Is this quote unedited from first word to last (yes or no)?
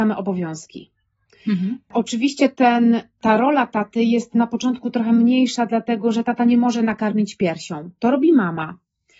yes